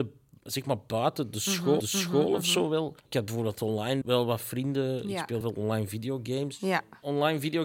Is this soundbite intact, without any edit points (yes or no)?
no